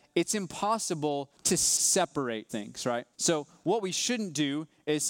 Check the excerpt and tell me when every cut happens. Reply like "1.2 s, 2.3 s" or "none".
1.4 s, 2.5 s, 3.1 s